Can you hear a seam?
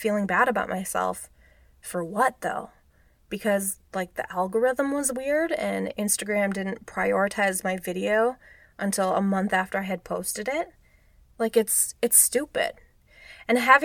no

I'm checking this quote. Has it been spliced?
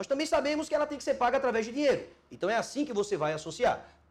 no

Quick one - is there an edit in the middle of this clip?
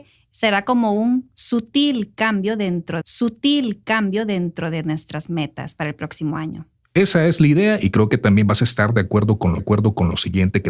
yes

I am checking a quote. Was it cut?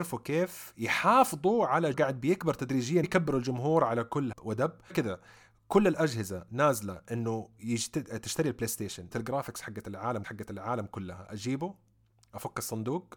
yes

